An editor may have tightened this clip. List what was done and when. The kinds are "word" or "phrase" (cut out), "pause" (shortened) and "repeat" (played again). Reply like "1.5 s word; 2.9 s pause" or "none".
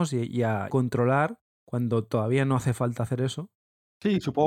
none